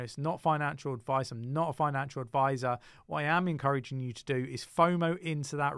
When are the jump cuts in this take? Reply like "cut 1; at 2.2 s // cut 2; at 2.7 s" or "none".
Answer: none

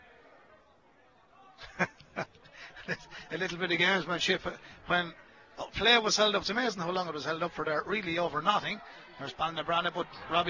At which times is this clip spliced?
none

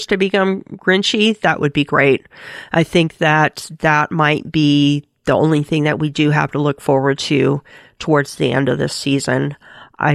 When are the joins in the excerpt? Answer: none

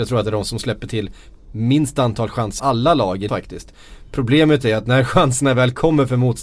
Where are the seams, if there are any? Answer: cut 1; at 2.6 s // cut 2; at 3.3 s

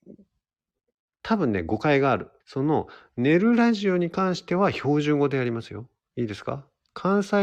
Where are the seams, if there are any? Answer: cut 1; at 2.4 s

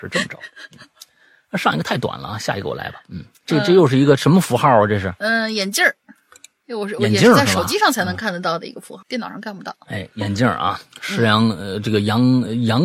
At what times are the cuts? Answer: cut 1; at 9.0 s

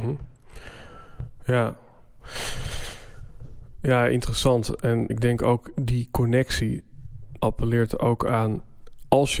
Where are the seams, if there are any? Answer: cut 1; at 5.1 s // cut 2; at 7.4 s

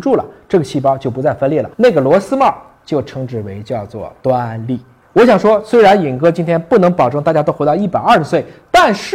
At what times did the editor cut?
cut 1; at 1.7 s // cut 2; at 5.0 s

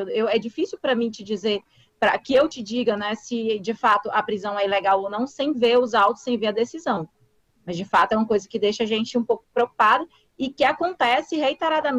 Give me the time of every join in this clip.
none

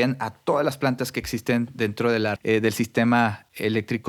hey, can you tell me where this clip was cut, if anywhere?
cut 1; at 2.4 s

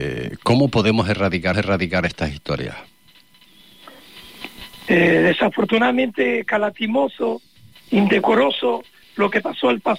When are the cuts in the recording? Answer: cut 1; at 1.5 s // cut 2; at 7.7 s

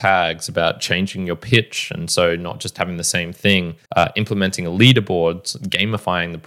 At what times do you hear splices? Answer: cut 1; at 3.8 s

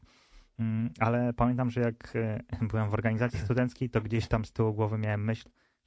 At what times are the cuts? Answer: none

